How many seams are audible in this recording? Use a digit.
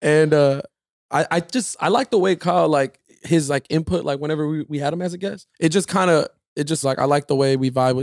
2